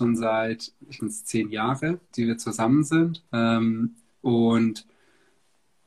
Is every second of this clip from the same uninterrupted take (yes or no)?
no